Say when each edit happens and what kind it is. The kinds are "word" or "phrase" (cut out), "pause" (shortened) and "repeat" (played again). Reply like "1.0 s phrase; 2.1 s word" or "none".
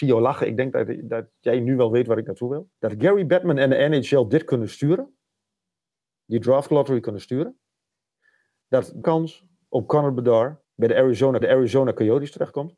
2.7 s pause; 9.0 s word; 10.6 s pause; 11.4 s repeat